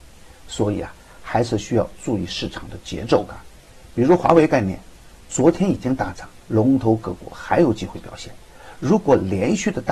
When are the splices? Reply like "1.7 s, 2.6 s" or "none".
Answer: 6.4 s